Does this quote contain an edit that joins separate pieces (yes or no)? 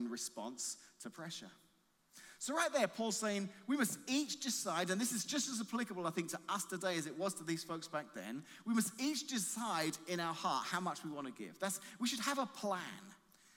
no